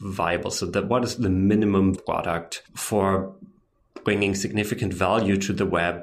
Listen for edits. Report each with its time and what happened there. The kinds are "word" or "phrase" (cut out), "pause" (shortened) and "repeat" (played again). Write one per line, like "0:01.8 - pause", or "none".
0:02.0 - word
0:02.7 - pause